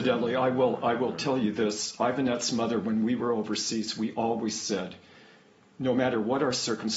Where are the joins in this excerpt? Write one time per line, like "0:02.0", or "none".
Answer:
none